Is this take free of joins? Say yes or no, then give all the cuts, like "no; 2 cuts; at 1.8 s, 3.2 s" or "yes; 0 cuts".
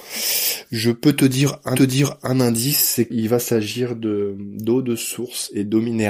no; 2 cuts; at 1.8 s, 3.1 s